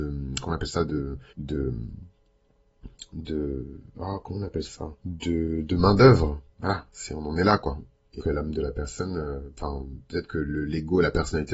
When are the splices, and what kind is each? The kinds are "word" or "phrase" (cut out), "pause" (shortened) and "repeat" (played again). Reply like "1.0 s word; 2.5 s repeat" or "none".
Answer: 1.3 s pause; 5.0 s pause; 6.5 s pause; 8.2 s word